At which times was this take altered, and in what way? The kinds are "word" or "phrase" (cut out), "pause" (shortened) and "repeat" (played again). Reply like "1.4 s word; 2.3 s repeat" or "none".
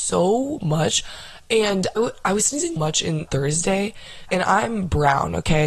2.0 s word; 2.8 s word; 3.3 s word; 4.3 s word